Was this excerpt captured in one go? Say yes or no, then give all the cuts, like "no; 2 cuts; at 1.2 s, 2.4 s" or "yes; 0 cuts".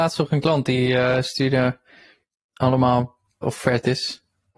no; 1 cut; at 3.4 s